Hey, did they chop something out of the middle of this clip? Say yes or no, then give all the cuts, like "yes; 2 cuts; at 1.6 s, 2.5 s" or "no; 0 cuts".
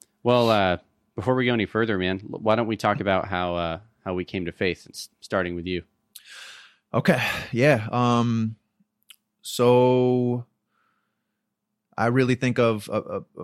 no; 0 cuts